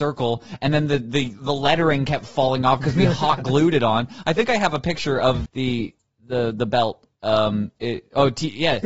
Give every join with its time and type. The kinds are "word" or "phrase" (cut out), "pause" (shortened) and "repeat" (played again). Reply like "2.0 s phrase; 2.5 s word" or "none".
5.5 s word